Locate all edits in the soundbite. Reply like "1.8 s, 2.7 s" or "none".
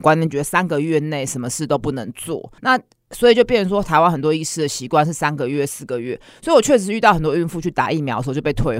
2.6 s